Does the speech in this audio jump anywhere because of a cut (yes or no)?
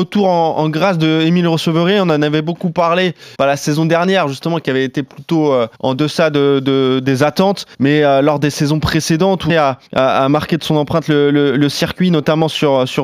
yes